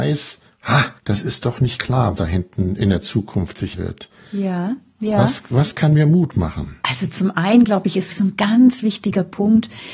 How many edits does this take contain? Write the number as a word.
six